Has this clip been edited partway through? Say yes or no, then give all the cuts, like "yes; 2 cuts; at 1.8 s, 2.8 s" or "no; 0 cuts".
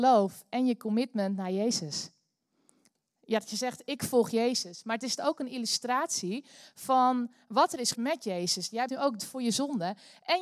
yes; 4 cuts; at 5.2 s, 7.9 s, 8.9 s, 9.2 s